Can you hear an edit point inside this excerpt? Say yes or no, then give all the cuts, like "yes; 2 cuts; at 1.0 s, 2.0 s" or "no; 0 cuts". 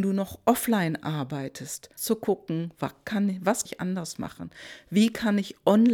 yes; 2 cuts; at 2.0 s, 3.7 s